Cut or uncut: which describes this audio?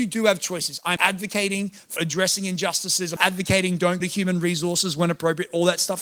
cut